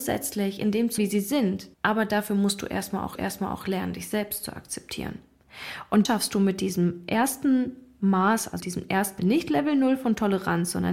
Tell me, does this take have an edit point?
yes; 6 cuts; at 1.0 s, 1.7 s, 3.1 s, 6.0 s, 8.6 s, 9.2 s

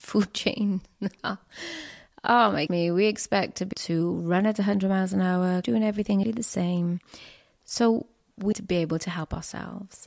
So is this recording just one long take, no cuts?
no; 6 cuts; at 1.2 s, 2.7 s, 3.7 s, 5.6 s, 6.2 s, 8.5 s

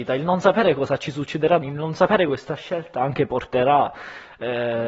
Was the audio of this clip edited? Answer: yes; 2 cuts; at 1.6 s, 2.3 s

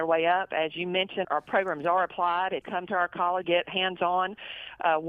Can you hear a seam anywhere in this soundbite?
yes; 3 cuts; at 1.2 s, 2.6 s, 3.4 s

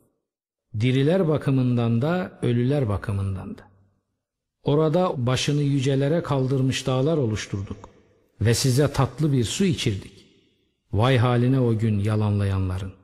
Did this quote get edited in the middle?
yes; 1 cut; at 5.1 s

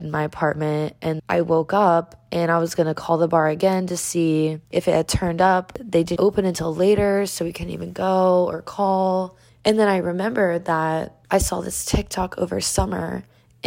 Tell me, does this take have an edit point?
yes; 5 cuts; at 1.2 s, 4.6 s, 6.2 s, 9.5 s, 11.2 s

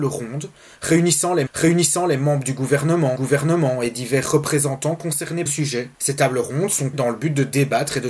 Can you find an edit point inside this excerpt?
yes; 5 cuts; at 1.5 s, 3.2 s, 5.5 s, 5.9 s, 6.9 s

